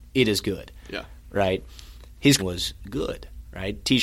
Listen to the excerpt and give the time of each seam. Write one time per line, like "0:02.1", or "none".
0:02.4